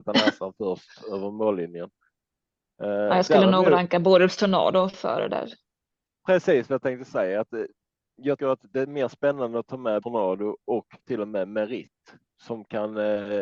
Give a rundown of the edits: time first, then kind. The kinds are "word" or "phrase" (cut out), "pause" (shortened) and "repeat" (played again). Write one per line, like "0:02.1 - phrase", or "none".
0:08.4 - word
0:10.0 - word
0:11.0 - word
0:12.3 - word